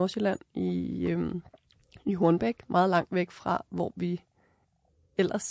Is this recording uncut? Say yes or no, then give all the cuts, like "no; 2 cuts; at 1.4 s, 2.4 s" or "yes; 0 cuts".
yes; 0 cuts